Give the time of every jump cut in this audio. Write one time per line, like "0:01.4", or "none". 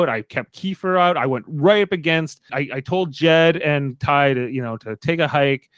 0:02.5